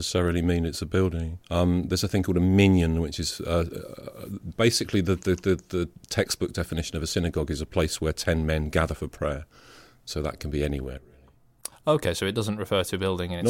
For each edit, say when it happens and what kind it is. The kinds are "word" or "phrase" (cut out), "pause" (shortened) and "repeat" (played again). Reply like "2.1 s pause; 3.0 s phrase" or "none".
1.4 s pause